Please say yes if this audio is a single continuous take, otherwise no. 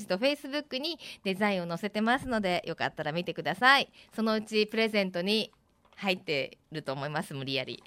yes